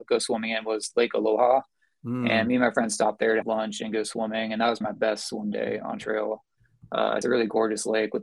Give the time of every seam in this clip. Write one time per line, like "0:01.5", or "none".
0:03.4
0:04.8
0:07.2